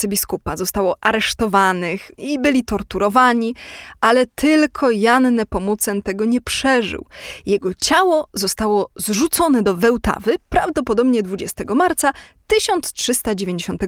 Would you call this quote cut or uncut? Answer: uncut